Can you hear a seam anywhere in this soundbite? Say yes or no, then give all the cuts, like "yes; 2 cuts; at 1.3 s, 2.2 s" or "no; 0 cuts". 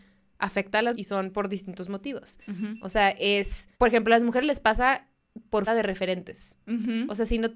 yes; 3 cuts; at 0.9 s, 3.7 s, 5.7 s